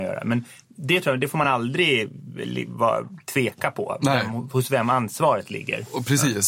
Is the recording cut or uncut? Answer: uncut